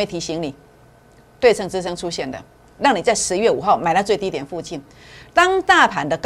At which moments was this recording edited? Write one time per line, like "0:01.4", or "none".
none